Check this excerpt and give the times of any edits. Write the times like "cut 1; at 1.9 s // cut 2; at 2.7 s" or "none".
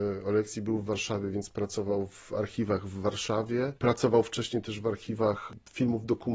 cut 1; at 3.8 s